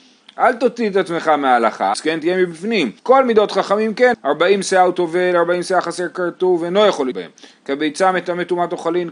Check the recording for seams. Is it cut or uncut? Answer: cut